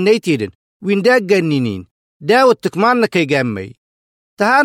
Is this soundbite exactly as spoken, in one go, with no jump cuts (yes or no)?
yes